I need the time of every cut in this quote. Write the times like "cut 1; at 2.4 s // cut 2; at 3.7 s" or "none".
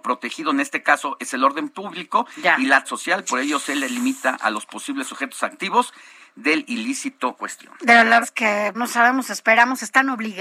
cut 1; at 2.8 s // cut 2; at 7.4 s // cut 3; at 8.2 s // cut 4; at 8.7 s